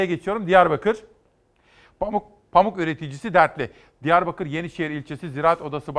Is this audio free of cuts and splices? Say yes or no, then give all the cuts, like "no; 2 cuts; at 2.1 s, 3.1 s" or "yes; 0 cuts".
yes; 0 cuts